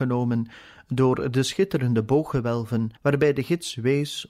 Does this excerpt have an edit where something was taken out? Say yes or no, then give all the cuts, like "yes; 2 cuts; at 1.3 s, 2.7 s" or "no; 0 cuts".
yes; 1 cut; at 3.0 s